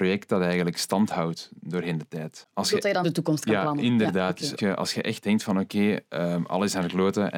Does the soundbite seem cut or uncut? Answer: cut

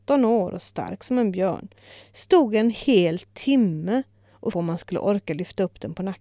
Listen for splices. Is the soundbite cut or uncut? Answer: cut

